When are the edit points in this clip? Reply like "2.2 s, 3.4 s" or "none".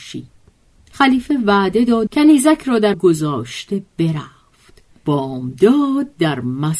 2.1 s, 2.9 s, 5.0 s